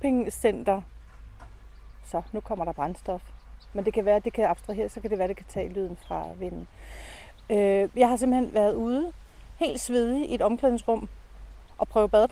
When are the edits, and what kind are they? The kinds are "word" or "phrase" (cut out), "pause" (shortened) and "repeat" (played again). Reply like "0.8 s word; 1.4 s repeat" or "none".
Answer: none

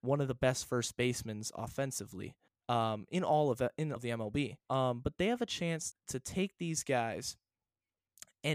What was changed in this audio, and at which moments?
2.5 s pause; 4.0 s word; 4.6 s pause; 5.9 s word

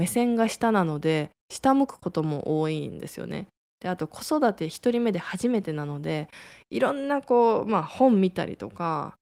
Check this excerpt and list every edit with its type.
none

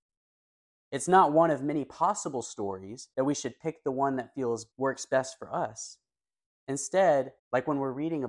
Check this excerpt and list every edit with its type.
3.1 s pause; 4.7 s pause; 7.4 s pause

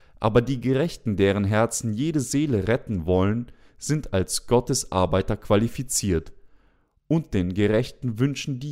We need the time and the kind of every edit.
none

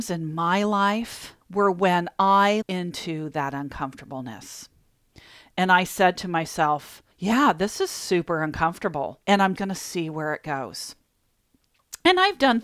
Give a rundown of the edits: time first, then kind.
1.4 s pause; 2.6 s word; 7.1 s pause; 9.2 s pause; 9.6 s word

